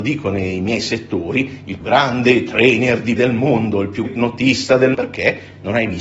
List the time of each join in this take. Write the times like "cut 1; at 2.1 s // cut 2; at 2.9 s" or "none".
cut 1; at 1.8 s // cut 2; at 3.2 s // cut 3; at 4.1 s // cut 4; at 4.9 s